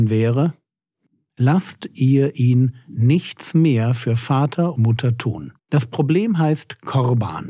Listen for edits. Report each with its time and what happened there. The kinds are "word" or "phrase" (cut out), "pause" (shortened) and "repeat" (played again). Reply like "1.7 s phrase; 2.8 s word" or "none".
4.8 s word; 5.6 s pause